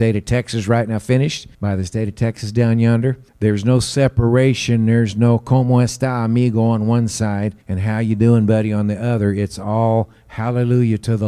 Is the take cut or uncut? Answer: cut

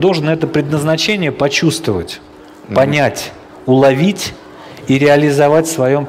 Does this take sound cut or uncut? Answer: uncut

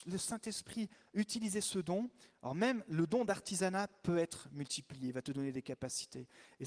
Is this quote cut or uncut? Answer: uncut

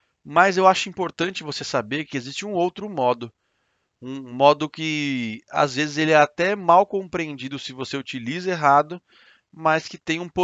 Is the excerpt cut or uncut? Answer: uncut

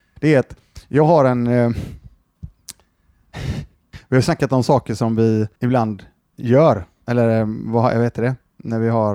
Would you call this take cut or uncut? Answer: cut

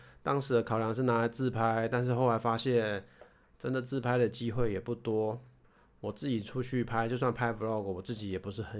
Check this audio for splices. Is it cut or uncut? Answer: uncut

